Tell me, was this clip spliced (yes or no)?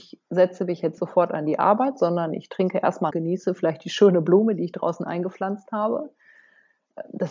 yes